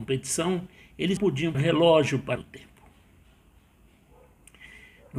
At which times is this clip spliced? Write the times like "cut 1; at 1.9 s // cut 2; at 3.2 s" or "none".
cut 1; at 1.2 s // cut 2; at 1.5 s // cut 3; at 2.4 s